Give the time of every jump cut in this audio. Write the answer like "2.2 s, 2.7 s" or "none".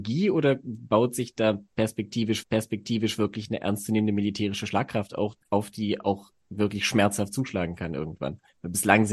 2.4 s, 5.4 s